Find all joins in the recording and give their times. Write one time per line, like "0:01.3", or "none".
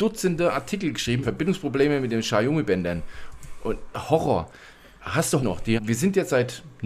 0:01.2
0:03.9
0:05.4
0:05.8